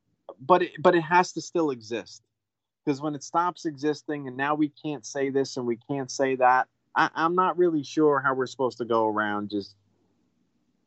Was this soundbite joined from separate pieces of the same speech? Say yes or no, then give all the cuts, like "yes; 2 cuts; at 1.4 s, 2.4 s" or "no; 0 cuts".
no; 0 cuts